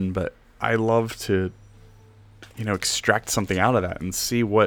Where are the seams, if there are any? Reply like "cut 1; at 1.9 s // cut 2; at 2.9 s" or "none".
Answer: cut 1; at 2.5 s